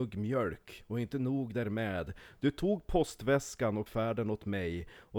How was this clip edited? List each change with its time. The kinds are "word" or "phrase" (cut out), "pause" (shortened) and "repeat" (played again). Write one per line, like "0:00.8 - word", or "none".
0:03.9 - word